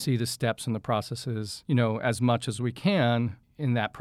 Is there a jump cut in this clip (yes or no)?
no